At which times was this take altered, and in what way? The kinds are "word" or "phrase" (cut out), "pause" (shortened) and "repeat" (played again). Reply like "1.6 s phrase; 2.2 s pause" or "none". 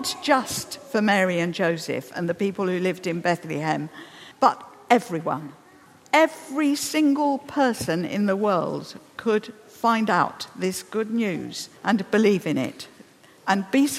4.3 s pause; 11.8 s pause